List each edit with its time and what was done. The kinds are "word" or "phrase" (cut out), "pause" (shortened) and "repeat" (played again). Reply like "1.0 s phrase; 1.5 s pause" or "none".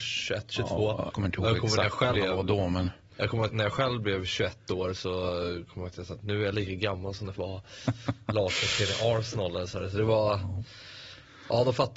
1.1 s word; 2.1 s word; 3.5 s word; 7.4 s word